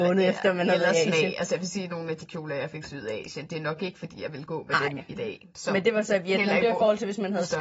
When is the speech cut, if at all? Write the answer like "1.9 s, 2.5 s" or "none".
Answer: none